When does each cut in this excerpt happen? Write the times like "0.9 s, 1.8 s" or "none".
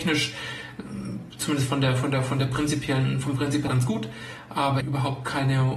3.7 s, 4.8 s